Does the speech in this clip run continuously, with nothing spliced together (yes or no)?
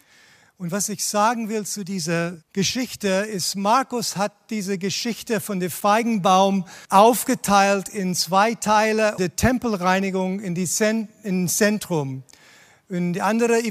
no